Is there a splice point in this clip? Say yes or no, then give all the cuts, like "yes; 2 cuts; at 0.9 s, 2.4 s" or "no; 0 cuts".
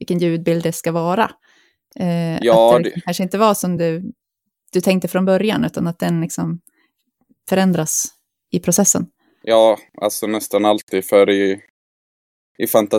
no; 0 cuts